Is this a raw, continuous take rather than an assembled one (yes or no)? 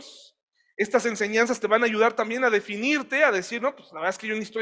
yes